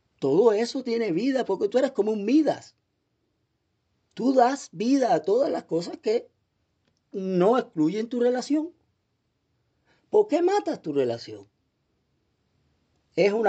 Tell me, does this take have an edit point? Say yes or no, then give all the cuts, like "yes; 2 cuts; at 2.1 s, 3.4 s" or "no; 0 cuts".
no; 0 cuts